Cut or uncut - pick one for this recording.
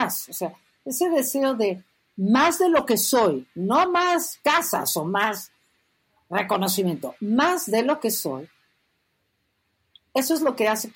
uncut